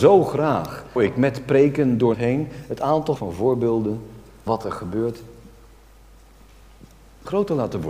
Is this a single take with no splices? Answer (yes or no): no